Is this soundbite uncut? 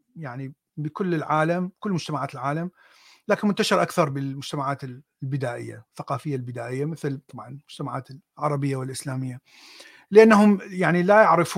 yes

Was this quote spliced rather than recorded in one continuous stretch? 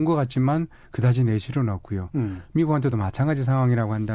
no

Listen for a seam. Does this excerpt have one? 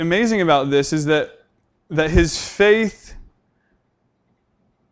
no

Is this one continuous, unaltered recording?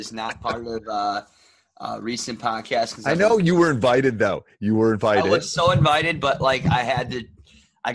yes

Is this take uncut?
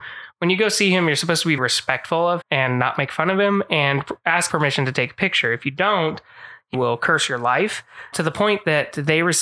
no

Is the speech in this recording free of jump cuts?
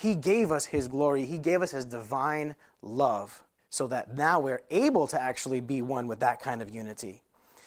no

